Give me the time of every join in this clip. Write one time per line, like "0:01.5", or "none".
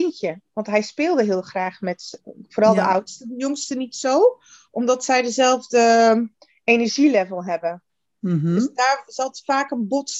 none